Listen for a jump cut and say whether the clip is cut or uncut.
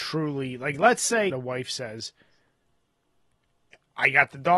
cut